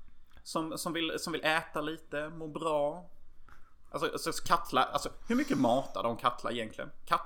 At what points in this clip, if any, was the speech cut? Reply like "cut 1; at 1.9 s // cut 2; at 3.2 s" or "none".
none